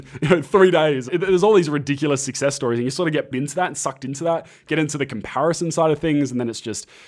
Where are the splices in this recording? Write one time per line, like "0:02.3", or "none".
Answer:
0:01.1
0:03.3